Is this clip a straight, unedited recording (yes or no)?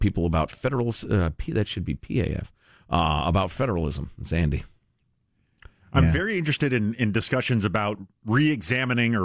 yes